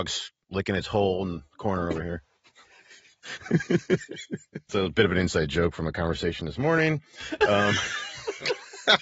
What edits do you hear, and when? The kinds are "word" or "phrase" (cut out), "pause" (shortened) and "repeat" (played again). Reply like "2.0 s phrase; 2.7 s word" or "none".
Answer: 4.7 s word